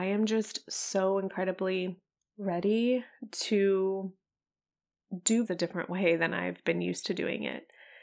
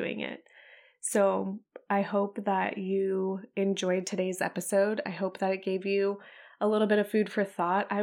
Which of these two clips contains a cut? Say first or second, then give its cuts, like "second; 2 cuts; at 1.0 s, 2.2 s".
first; 2 cuts; at 2.2 s, 5.4 s